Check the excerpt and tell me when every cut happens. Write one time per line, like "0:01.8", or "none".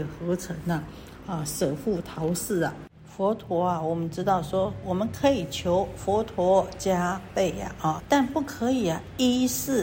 0:08.0